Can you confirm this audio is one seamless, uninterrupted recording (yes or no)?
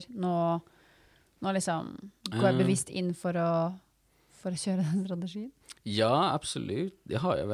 no